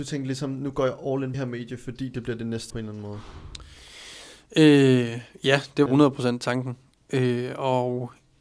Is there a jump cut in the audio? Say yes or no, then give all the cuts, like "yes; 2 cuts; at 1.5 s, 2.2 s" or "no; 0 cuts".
yes; 3 cuts; at 1.3 s, 2.7 s, 5.9 s